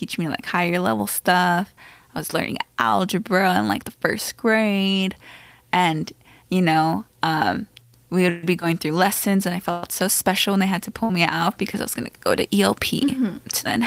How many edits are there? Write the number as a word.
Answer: zero